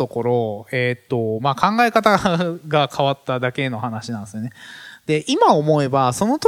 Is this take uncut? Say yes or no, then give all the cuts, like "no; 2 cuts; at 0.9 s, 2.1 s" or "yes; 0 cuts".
yes; 0 cuts